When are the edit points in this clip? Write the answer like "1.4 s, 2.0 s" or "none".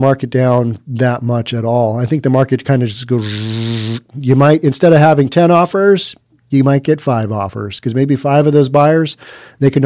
none